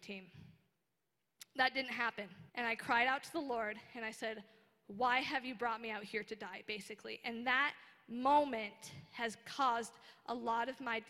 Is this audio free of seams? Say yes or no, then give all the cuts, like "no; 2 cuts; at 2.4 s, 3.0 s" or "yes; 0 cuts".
no; 1 cut; at 2.5 s